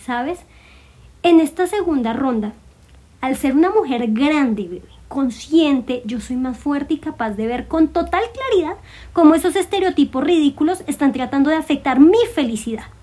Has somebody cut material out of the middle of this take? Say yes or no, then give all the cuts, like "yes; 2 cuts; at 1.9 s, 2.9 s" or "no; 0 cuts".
no; 0 cuts